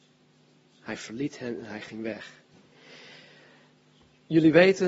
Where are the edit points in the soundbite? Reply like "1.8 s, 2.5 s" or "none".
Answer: none